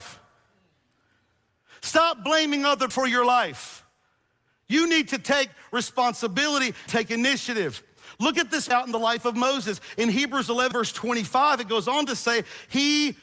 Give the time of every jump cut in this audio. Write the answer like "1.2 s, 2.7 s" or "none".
2.9 s, 6.9 s, 8.7 s, 10.7 s